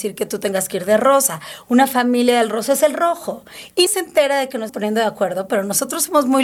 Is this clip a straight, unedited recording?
no; 2 cuts; at 3.9 s, 4.7 s

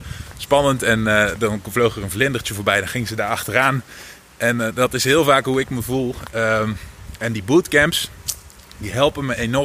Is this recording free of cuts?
yes; 0 cuts

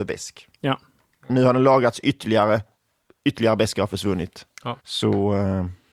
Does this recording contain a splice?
yes; 1 cut; at 4.8 s

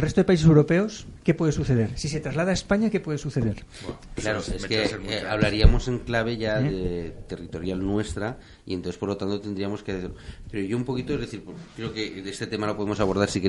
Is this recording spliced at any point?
no; 0 cuts

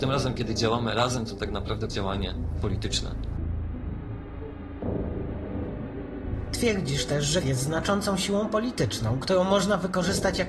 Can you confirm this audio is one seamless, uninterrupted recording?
no; 2 cuts; at 1.9 s, 7.4 s

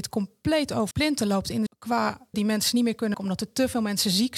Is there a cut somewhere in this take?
yes; 4 cuts; at 0.9 s, 1.7 s, 2.3 s, 3.1 s

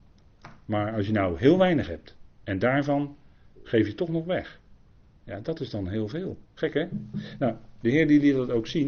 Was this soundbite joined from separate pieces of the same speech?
yes; 2 cuts; at 2.3 s, 6.4 s

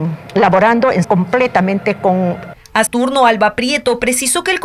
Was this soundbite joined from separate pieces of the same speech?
yes; 3 cuts; at 1.0 s, 2.5 s, 2.9 s

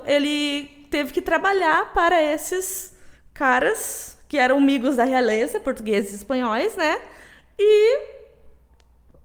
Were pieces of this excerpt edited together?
no; 0 cuts

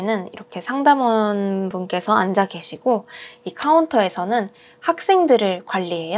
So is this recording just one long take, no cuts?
yes; 0 cuts

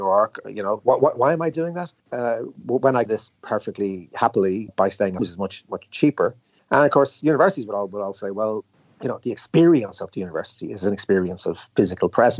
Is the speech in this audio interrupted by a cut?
yes; 6 cuts; at 2.0 s, 3.1 s, 4.7 s, 5.2 s, 6.6 s, 8.7 s

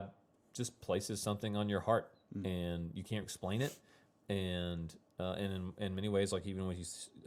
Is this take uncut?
no; 1 cut; at 3.2 s

